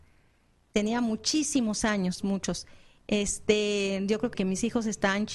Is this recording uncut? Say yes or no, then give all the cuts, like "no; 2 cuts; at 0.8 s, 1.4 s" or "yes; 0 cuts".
no; 2 cuts; at 2.2 s, 4.3 s